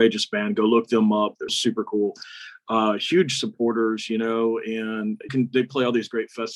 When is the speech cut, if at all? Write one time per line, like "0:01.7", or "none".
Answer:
0:01.5
0:05.3

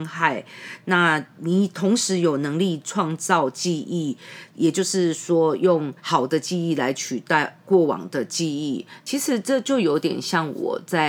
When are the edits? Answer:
0:06.0

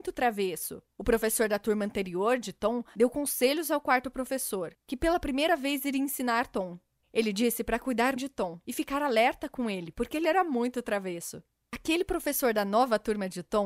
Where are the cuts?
0:08.2

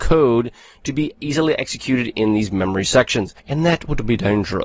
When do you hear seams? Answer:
0:03.4

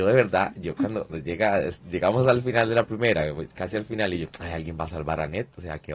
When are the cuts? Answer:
0:01.1

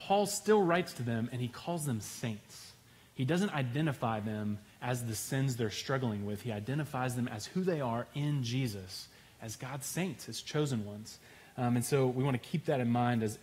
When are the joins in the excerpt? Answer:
none

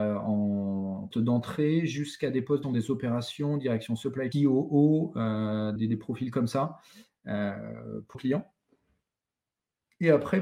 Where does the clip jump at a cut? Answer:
0:01.1
0:02.6
0:04.3
0:05.8
0:08.1

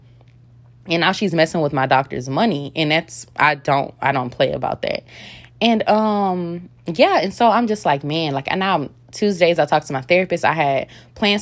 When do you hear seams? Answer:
0:09.0

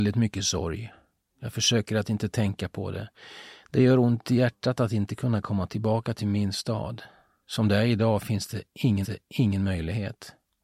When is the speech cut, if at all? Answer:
0:09.0

